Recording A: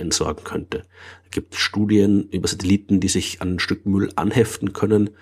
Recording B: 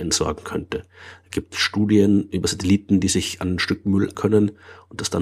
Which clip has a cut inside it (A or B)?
B